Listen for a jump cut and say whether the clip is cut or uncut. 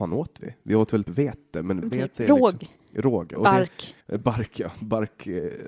cut